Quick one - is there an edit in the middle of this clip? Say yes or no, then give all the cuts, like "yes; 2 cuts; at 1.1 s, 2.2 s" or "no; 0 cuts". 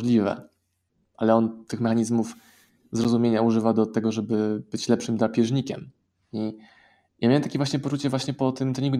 no; 0 cuts